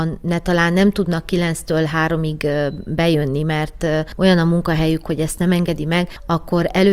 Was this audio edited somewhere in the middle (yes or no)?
no